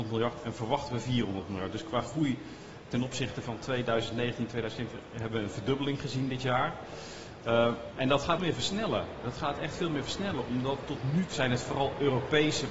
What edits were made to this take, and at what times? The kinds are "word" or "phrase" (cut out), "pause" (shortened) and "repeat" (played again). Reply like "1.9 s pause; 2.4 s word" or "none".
8.4 s phrase; 11.3 s word